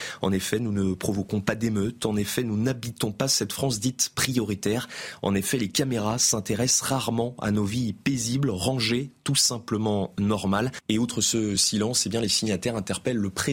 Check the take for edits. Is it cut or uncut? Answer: uncut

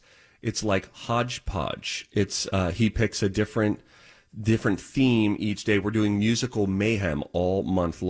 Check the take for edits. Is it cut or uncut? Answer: uncut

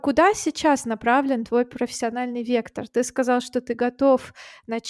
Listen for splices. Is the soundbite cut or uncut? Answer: uncut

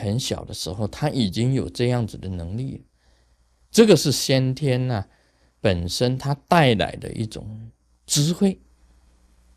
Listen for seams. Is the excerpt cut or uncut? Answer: uncut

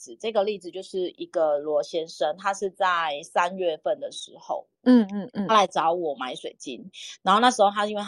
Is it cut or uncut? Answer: cut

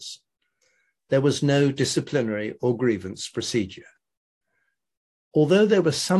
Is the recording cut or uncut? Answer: uncut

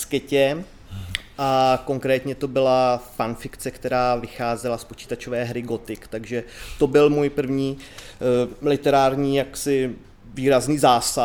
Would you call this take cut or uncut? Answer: uncut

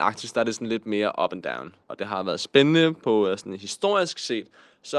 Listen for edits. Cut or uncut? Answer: cut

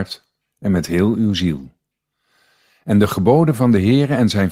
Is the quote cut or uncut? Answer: uncut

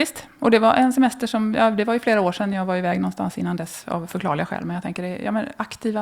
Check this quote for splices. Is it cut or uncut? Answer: uncut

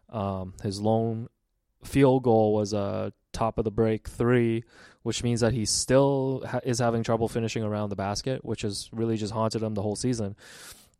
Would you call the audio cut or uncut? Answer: uncut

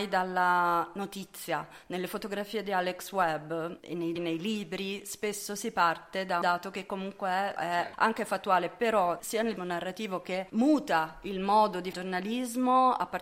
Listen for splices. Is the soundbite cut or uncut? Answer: cut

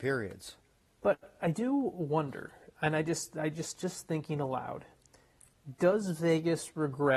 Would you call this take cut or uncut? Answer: uncut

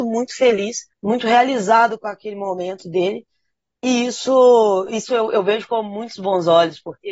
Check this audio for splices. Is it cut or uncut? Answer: cut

